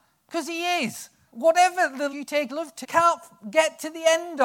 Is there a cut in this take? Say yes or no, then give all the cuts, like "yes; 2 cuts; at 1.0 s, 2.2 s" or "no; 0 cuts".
yes; 4 cuts; at 1.3 s, 2.1 s, 2.5 s, 2.8 s